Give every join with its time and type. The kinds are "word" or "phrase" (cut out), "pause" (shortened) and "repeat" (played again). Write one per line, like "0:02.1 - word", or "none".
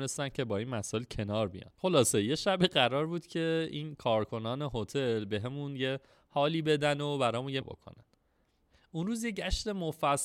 0:07.6 - phrase